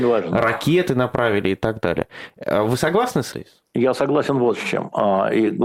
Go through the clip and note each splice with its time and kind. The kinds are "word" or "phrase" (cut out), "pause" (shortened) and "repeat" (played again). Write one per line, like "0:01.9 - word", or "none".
0:03.3 - word